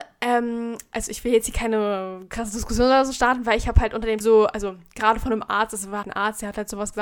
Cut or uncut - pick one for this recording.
cut